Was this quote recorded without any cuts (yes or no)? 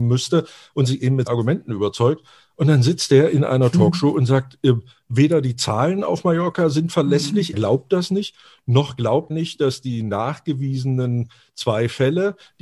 no